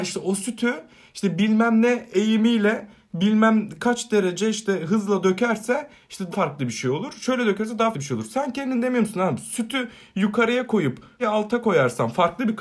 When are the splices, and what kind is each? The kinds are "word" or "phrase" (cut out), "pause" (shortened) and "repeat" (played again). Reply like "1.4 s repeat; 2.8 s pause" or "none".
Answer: 6.3 s word; 7.9 s word; 11.2 s word